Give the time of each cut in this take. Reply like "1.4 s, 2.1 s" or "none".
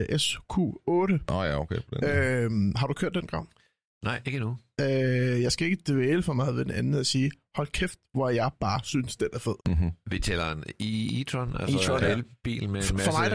9.6 s